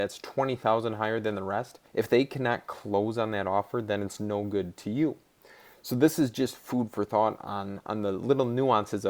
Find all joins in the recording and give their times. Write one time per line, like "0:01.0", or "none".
0:01.9